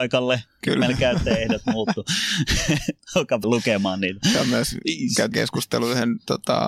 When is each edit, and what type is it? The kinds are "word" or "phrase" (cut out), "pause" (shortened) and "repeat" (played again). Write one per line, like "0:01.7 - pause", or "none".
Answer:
0:03.4 - word
0:05.3 - word